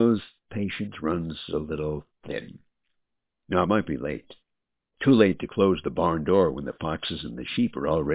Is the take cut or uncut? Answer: uncut